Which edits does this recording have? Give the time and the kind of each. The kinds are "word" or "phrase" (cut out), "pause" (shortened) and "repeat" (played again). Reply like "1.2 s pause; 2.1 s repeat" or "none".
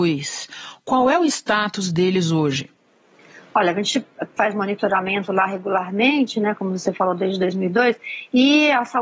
none

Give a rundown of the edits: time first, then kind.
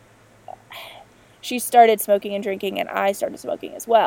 none

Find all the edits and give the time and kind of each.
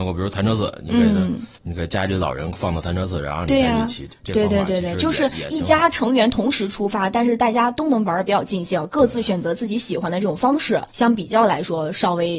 1.5 s pause; 10.9 s pause

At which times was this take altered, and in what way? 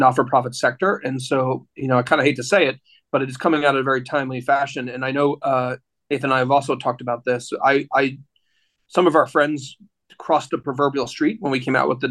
none

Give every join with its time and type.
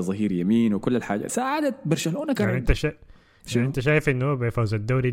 1.3 s word; 2.3 s word

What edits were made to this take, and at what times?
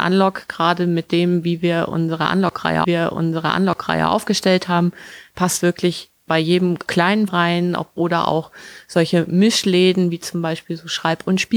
2.8 s repeat; 5.6 s word; 6.9 s word; 7.3 s word

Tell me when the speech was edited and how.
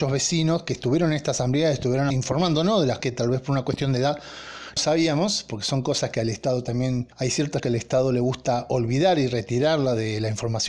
2.1 s phrase; 3.0 s word; 4.8 s word; 7.1 s pause; 7.6 s word

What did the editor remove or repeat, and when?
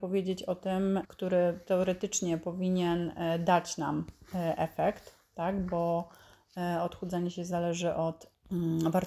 1.0 s word

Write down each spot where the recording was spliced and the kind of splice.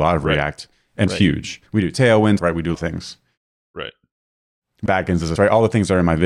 1.1 s phrase; 1.7 s pause; 2.4 s word; 2.7 s word; 4.9 s phrase; 5.4 s word

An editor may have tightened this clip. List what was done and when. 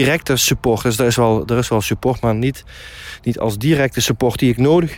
none

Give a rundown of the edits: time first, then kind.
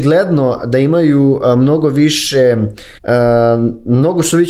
3.0 s pause

